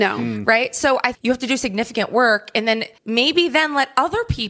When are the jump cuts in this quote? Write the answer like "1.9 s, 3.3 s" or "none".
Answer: 1.1 s, 3.0 s